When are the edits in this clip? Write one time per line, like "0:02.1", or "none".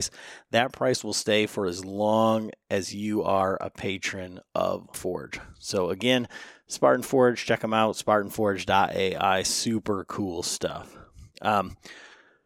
0:04.9